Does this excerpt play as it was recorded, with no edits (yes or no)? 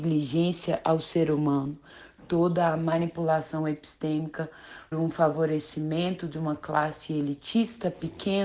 no